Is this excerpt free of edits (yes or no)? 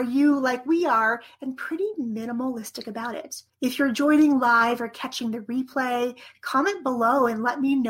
no